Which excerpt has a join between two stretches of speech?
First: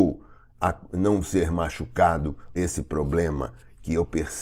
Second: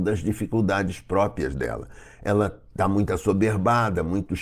first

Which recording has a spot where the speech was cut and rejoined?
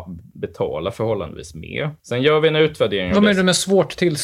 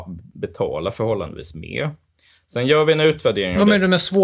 first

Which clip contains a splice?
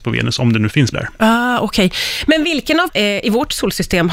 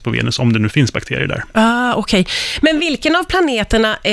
first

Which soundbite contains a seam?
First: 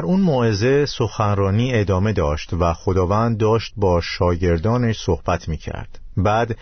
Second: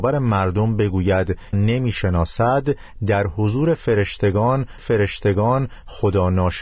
second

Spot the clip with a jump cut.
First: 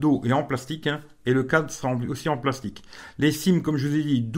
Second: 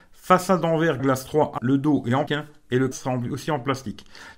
second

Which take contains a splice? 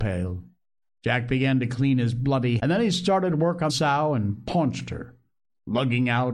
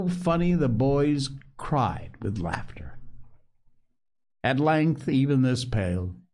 first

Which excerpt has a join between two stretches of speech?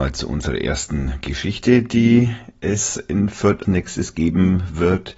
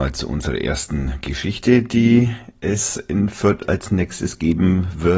first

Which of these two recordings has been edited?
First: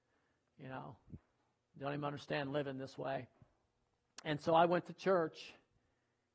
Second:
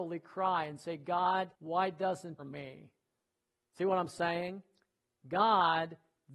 second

